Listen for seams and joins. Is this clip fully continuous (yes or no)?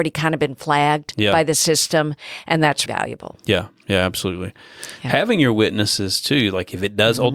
no